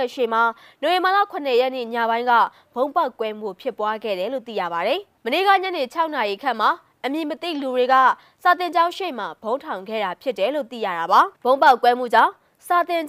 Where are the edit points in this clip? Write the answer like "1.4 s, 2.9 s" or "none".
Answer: 11.3 s

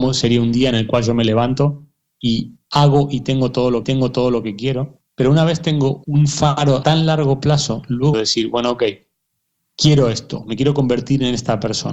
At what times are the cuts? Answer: 2.6 s, 3.8 s, 5.1 s, 6.0 s, 6.8 s, 8.1 s

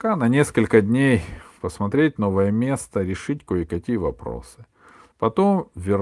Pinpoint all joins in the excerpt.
none

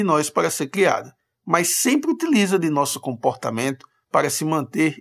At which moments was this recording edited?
none

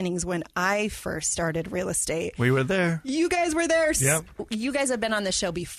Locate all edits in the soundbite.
none

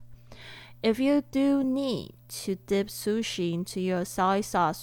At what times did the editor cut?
none

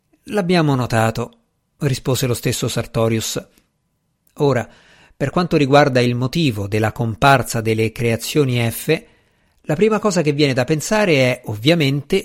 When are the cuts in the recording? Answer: none

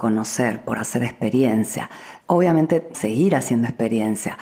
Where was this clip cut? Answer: 2.9 s

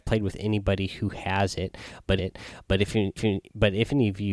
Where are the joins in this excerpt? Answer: 2.2 s, 3.2 s

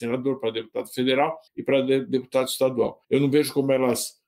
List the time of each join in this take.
1.5 s, 3.0 s

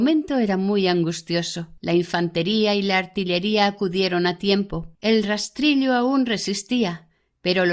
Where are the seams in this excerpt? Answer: 1.8 s, 4.9 s

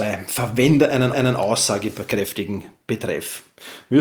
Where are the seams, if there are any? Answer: 1.1 s

